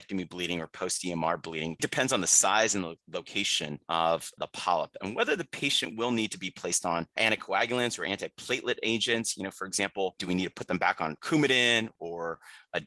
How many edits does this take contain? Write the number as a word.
one